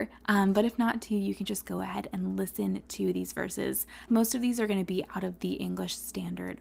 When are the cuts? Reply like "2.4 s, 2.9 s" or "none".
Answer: 4.1 s